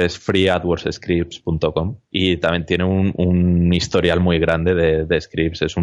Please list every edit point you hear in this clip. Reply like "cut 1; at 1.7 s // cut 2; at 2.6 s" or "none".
cut 1; at 2.1 s